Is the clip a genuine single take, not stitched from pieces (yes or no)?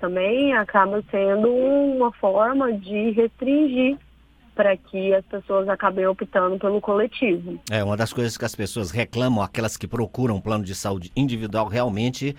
no